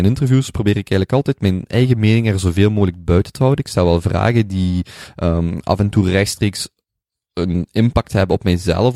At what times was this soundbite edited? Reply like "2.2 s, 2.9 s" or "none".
none

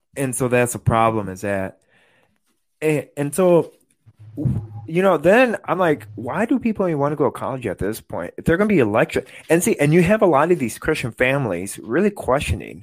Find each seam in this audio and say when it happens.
none

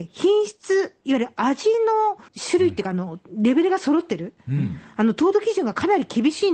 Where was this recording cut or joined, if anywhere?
2.3 s

